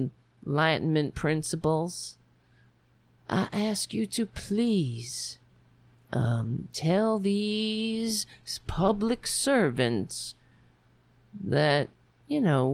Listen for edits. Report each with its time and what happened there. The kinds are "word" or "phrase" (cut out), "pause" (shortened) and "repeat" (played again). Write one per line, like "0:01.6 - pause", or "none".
none

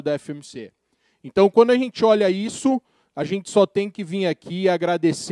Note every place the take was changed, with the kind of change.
none

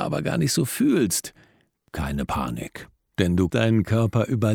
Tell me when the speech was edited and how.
0:03.5 - word

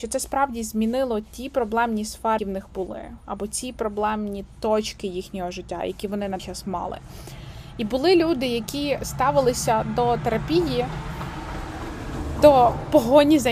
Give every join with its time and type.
0:02.4 - word
0:06.4 - word
0:12.4 - word

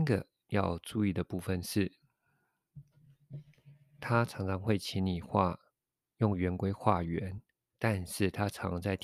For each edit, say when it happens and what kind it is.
0:07.6 - pause

